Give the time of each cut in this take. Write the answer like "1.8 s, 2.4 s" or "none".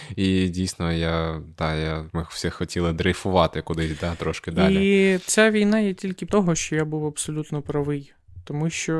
2.1 s, 6.3 s